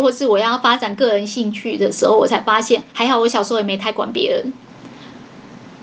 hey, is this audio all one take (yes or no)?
no